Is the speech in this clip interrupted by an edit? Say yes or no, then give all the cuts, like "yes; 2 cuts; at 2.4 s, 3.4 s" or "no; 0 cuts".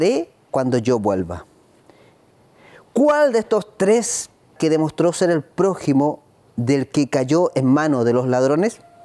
yes; 1 cut; at 4.6 s